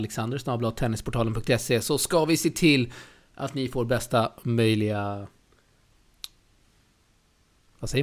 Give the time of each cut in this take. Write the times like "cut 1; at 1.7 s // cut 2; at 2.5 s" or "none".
none